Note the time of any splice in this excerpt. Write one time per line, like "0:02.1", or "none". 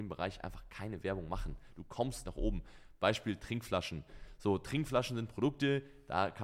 0:02.3